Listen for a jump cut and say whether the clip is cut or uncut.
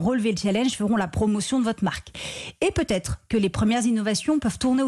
uncut